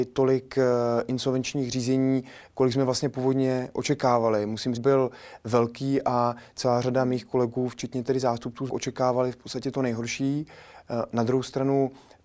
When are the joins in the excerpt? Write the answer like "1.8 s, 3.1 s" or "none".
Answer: 4.8 s, 8.7 s